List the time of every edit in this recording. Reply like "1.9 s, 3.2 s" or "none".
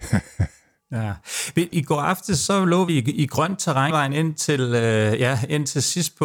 1.7 s, 2.9 s, 3.9 s